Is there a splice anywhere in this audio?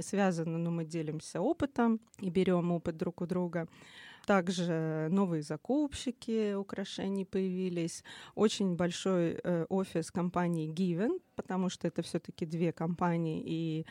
yes; 1 cut; at 2.1 s

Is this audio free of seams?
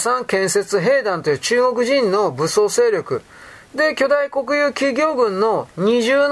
yes; 0 cuts

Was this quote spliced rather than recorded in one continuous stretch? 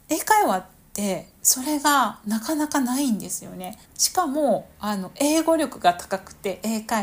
yes; 1 cut; at 3.9 s

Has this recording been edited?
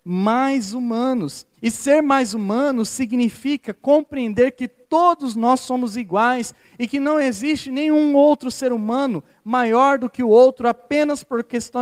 yes; 1 cut; at 1.5 s

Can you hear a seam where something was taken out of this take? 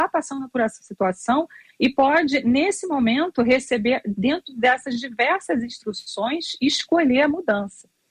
no; 0 cuts

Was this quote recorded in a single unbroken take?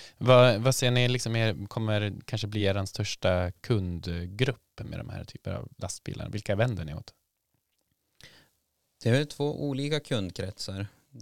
yes; 0 cuts

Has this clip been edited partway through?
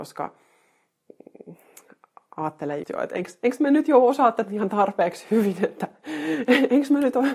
yes; 1 cut; at 2.8 s

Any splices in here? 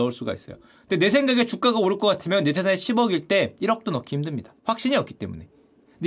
yes; 1 cut; at 4.6 s

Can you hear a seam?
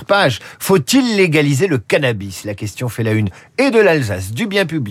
no; 0 cuts

